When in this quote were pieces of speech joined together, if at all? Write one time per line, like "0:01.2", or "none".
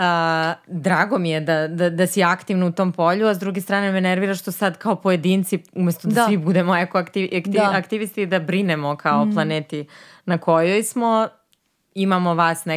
none